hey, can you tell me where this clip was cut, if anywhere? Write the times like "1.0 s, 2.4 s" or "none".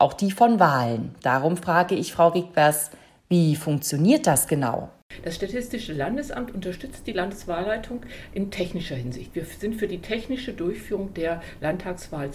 none